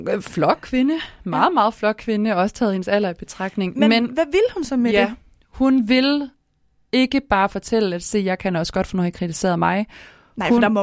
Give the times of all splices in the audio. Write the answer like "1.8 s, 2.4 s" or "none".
none